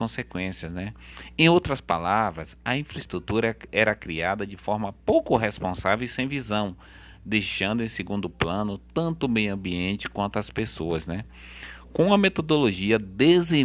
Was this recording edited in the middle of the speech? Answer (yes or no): no